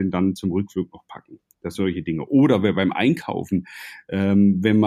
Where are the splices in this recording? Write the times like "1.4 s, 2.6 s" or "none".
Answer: 1.7 s